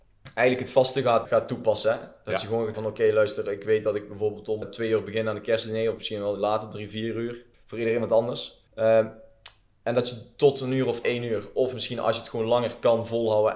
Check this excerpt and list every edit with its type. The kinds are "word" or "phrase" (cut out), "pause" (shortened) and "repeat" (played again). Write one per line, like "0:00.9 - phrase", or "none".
0:01.2 - word
0:02.7 - word
0:04.6 - word
0:07.5 - pause
0:08.7 - pause
0:11.0 - word